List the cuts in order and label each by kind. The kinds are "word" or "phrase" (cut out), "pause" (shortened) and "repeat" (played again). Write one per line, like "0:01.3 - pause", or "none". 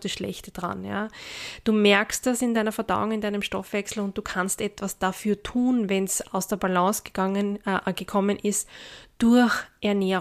none